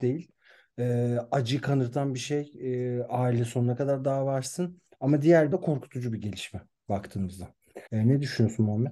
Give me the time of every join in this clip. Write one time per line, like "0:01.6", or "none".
0:05.5
0:07.9